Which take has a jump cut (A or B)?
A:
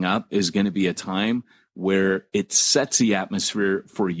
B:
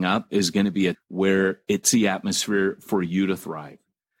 B